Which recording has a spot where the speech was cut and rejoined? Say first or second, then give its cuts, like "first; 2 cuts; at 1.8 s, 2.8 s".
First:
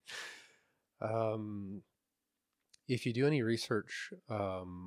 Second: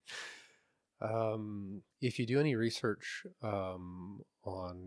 second; 1 cut; at 1.9 s